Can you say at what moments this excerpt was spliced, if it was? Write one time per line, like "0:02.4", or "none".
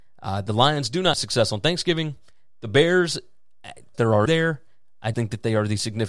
0:01.1
0:03.9
0:04.3
0:05.1